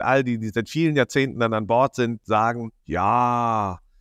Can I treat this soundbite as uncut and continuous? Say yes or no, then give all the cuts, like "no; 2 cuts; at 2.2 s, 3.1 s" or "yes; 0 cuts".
no; 1 cut; at 2.8 s